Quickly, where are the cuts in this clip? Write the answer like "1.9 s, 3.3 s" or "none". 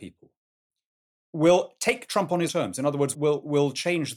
2.5 s, 3.1 s